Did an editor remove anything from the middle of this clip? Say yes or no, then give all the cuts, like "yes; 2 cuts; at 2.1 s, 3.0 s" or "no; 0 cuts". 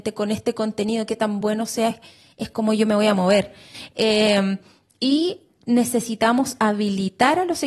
no; 0 cuts